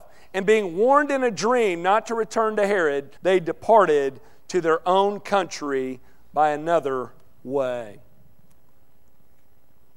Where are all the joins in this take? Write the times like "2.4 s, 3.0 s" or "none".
3.2 s